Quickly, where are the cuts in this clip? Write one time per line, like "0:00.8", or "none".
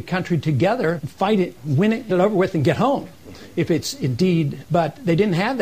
0:01.0
0:02.1
0:04.6